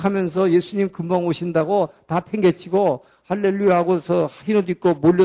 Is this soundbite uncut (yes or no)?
yes